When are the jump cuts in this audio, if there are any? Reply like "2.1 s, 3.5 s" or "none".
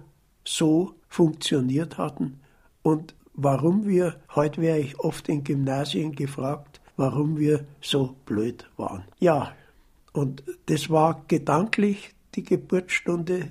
1.0 s, 3.2 s, 4.2 s, 6.9 s, 9.1 s